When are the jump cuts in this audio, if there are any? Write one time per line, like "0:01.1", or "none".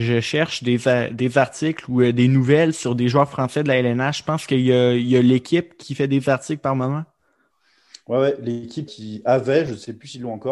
0:08.9